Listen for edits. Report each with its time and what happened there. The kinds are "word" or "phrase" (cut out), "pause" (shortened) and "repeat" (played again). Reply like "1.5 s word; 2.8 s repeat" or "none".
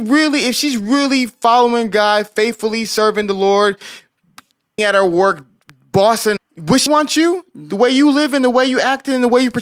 4.8 s word; 6.4 s word; 6.9 s word